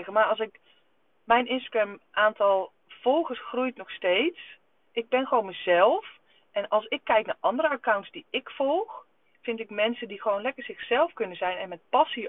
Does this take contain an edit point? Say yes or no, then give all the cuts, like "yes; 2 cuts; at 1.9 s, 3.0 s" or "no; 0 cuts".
no; 0 cuts